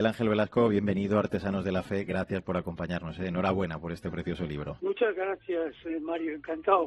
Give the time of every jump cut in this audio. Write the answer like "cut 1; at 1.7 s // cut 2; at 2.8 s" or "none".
none